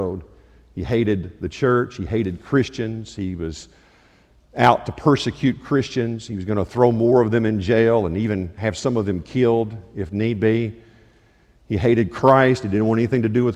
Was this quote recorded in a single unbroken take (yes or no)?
yes